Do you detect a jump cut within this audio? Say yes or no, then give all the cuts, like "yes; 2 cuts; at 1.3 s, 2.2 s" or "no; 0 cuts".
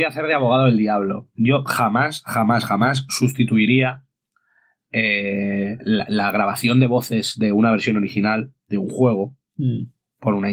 no; 0 cuts